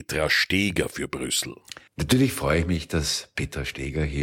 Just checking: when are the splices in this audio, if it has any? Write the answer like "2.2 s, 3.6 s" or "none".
1.9 s